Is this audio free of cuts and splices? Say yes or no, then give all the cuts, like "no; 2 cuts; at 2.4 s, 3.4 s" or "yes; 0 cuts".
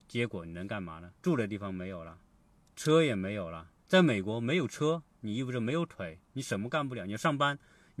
no; 3 cuts; at 1.2 s, 2.4 s, 3.8 s